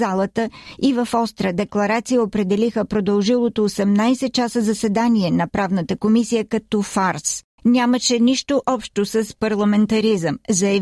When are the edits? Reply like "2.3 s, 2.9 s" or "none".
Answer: 7.5 s